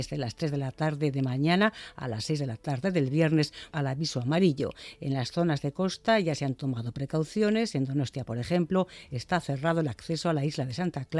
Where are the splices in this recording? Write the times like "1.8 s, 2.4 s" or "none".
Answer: 3.7 s